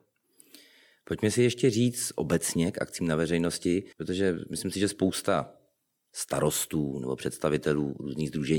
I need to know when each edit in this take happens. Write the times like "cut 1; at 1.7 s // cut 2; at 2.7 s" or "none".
cut 1; at 3.9 s